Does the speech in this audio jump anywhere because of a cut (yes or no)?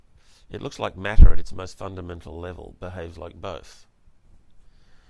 no